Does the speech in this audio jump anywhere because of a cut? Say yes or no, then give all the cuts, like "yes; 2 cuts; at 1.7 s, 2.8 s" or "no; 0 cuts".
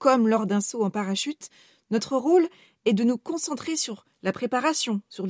no; 0 cuts